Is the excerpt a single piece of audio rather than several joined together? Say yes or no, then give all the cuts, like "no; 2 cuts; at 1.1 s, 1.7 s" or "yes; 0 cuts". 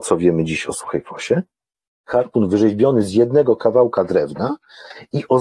yes; 0 cuts